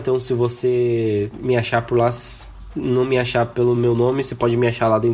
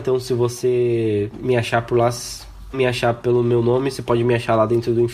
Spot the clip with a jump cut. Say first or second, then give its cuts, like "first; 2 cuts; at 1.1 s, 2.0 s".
second; 1 cut; at 2.7 s